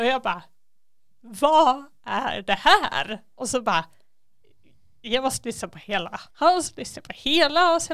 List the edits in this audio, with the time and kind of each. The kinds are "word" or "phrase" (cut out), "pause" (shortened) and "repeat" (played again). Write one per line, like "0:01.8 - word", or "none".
0:06.3 - pause

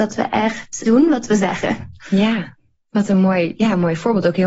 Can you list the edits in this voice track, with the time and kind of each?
none

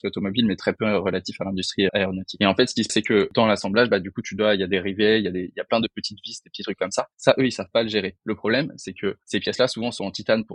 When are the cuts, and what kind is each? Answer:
0:01.9 - word
0:02.9 - word
0:07.1 - pause

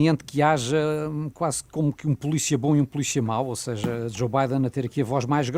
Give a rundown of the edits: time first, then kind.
none

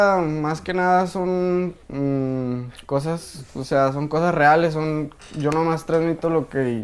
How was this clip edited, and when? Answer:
0:01.8 - pause

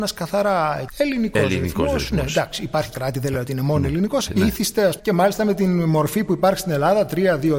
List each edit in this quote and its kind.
0:02.9 - phrase
0:04.3 - phrase
0:05.0 - word

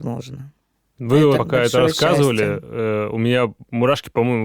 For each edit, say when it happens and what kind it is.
0:01.4 - word

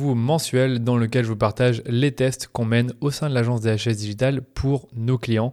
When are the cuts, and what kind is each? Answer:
none

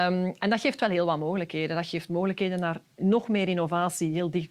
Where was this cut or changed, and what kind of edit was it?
none

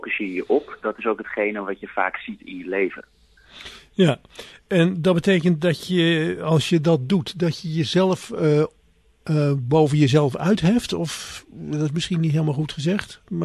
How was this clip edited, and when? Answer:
none

